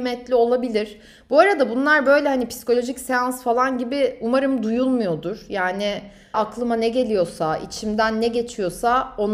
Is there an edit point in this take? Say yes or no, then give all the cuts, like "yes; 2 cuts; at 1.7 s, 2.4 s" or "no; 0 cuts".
yes; 1 cut; at 6.3 s